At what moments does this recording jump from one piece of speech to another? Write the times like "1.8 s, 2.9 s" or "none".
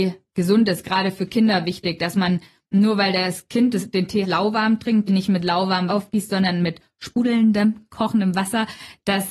4.2 s, 5.1 s, 5.9 s